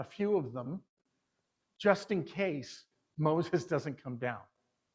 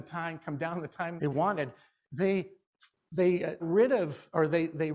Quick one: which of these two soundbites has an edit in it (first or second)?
second